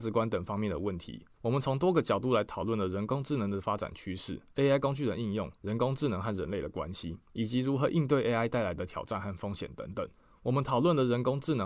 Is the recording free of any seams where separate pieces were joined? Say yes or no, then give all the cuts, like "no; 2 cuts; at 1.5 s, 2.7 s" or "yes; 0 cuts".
no; 5 cuts; at 1.3 s, 4.5 s, 5.6 s, 7.2 s, 10.1 s